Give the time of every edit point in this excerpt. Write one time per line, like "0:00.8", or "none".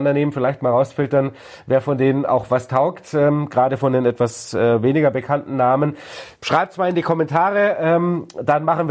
0:06.4